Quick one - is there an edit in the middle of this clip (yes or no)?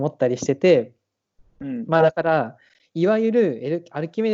no